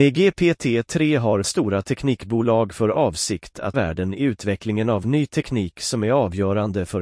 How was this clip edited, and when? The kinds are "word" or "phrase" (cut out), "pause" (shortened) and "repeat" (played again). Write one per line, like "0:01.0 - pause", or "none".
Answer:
0:01.4 - word
0:03.7 - word